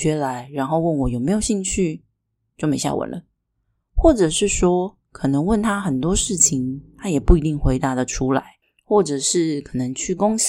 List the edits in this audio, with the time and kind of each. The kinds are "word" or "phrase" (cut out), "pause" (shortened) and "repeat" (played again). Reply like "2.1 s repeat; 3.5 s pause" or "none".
8.6 s pause